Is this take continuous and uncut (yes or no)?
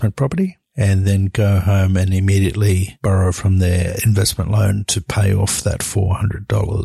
yes